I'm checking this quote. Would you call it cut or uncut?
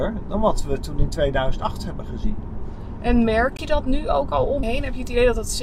cut